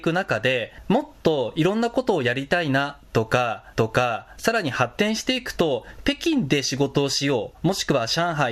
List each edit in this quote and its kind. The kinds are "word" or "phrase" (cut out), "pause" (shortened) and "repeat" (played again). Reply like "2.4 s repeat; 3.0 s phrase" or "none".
3.7 s repeat